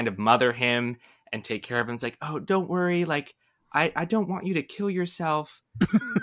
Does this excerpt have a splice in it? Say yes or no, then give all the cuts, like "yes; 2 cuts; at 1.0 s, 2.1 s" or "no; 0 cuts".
no; 0 cuts